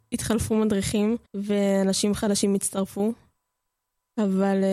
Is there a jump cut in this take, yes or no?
yes